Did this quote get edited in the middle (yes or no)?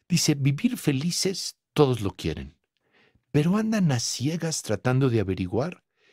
no